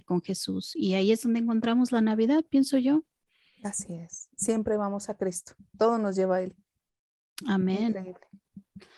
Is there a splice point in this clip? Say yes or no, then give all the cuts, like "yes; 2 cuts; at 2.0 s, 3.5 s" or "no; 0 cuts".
no; 0 cuts